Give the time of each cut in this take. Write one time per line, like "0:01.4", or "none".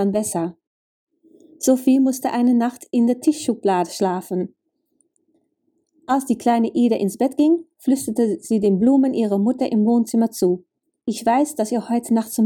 none